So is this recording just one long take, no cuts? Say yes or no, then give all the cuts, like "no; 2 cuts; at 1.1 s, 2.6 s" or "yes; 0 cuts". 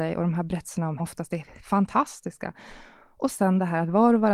no; 1 cut; at 1.0 s